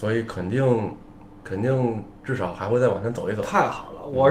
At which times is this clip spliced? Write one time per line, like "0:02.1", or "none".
none